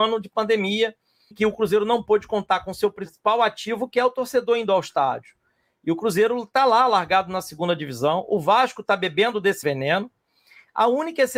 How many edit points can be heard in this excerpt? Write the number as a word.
two